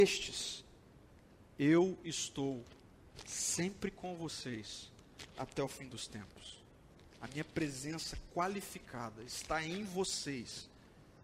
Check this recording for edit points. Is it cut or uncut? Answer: uncut